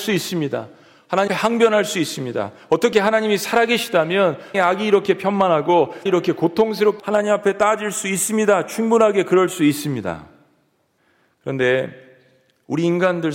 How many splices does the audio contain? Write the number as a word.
five